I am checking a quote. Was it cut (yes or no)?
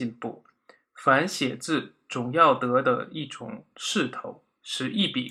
no